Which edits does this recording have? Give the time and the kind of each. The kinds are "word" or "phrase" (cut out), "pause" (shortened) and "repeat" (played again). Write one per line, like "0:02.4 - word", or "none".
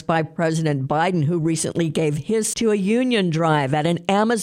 0:02.5 - word